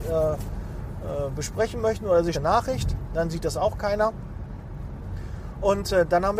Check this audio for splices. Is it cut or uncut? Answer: cut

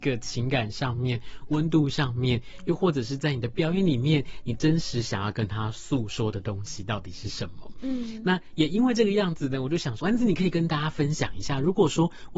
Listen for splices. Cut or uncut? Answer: cut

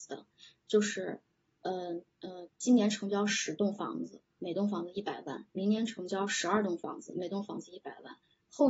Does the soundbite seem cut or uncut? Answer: cut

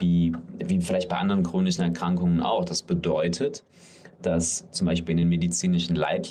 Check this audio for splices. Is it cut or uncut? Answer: uncut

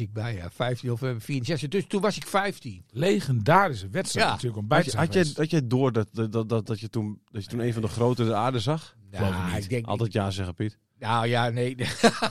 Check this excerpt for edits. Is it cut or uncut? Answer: uncut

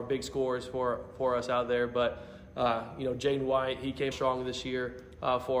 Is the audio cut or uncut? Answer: cut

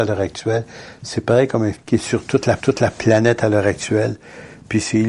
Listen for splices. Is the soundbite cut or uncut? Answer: cut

